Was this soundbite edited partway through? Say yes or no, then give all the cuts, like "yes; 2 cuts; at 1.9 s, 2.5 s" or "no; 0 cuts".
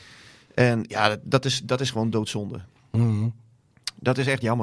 no; 0 cuts